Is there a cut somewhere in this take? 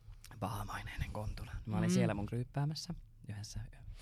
yes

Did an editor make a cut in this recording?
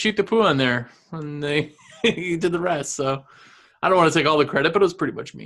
no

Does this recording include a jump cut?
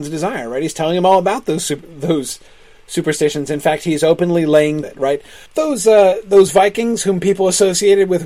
yes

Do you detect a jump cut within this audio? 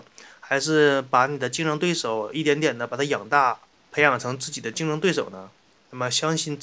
no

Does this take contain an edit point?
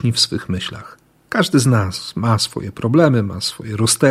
no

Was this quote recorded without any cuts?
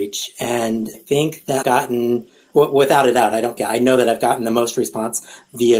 no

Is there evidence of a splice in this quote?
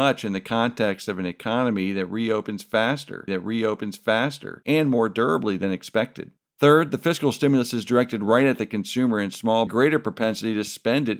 yes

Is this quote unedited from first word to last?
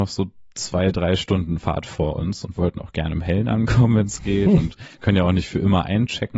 yes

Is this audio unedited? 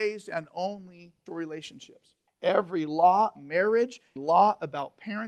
no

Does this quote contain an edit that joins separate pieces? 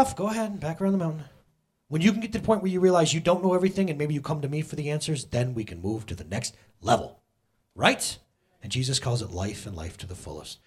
no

